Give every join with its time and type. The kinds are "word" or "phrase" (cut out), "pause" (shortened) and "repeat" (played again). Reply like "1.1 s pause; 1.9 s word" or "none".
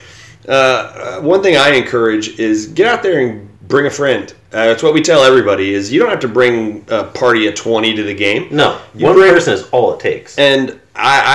3.6 s pause